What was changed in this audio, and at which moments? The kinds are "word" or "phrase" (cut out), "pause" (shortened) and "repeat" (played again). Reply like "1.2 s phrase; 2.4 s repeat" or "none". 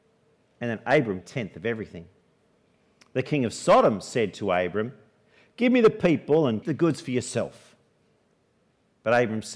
1.2 s phrase; 6.6 s word